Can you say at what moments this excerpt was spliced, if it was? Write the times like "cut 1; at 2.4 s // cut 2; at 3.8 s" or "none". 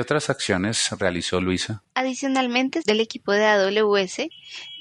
cut 1; at 2.8 s